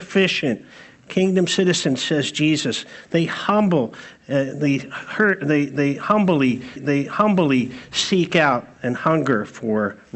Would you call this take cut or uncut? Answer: cut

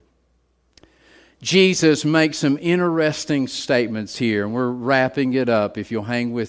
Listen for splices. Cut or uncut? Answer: uncut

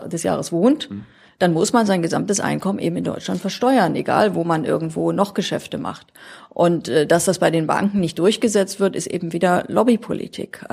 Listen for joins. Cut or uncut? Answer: uncut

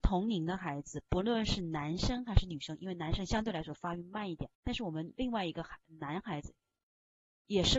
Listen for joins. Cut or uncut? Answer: cut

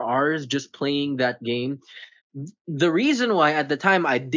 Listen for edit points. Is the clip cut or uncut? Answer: cut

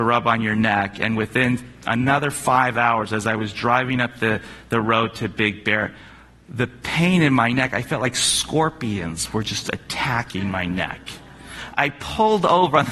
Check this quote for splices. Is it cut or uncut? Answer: uncut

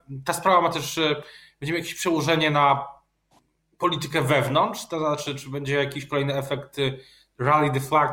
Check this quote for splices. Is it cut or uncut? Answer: uncut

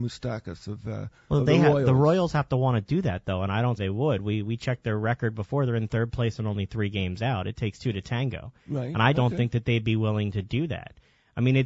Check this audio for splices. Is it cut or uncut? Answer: cut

